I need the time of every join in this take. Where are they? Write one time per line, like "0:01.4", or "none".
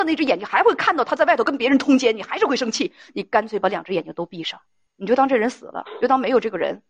0:04.9